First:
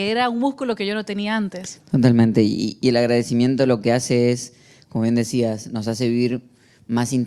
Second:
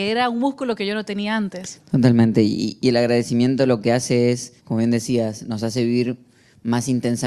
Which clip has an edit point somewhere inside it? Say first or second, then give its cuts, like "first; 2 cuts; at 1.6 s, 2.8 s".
second; 1 cut; at 4.6 s